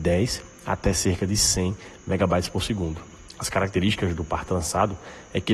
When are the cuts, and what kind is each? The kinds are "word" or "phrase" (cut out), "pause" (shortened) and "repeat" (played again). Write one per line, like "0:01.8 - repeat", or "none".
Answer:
none